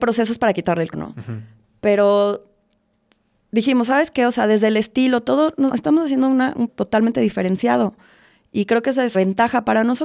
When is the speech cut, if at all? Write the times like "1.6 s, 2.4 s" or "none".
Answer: 0.9 s, 5.7 s, 6.7 s, 9.1 s